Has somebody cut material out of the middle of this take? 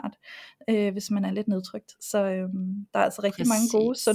no; 0 cuts

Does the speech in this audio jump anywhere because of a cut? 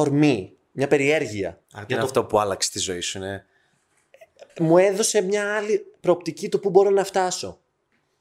yes; 2 cuts; at 1.6 s, 4.5 s

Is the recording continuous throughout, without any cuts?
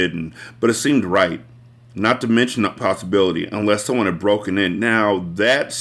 no; 1 cut; at 2.8 s

